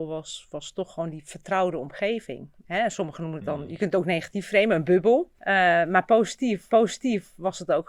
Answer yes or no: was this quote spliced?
yes